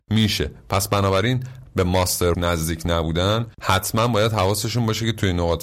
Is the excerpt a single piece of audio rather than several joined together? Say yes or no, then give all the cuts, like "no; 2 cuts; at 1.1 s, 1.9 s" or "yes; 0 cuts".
no; 3 cuts; at 1.7 s, 2.3 s, 3.5 s